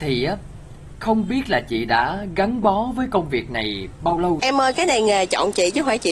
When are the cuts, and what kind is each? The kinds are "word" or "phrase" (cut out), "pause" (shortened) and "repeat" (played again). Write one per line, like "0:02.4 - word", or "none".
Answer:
0:04.4 - word